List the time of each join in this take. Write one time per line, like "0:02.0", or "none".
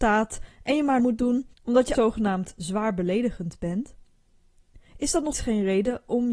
0:01.0
0:01.5
0:01.9
0:05.3